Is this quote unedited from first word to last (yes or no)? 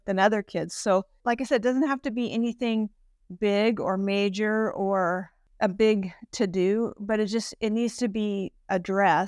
yes